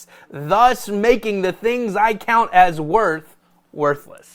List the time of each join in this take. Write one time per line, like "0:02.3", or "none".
none

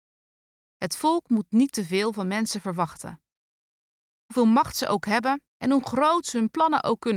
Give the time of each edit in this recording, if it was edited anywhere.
0:05.5

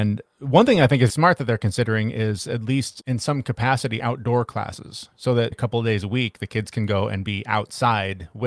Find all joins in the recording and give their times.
0:01.1
0:03.0
0:04.0
0:05.5

